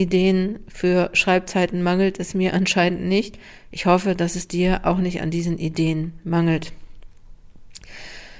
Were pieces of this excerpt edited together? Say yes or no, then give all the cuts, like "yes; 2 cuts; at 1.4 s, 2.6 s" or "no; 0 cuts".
no; 0 cuts